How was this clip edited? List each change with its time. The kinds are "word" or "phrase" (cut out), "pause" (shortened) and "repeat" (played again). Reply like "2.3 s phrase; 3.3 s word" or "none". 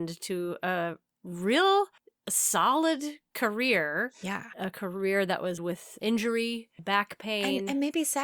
2.0 s pause; 4.5 s word; 5.6 s word